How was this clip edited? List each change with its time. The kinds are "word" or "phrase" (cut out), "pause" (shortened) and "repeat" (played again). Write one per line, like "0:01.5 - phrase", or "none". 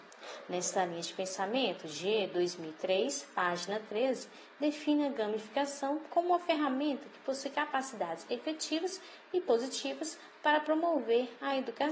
none